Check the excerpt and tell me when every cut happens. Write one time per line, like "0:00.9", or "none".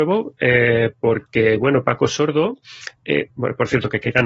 0:03.3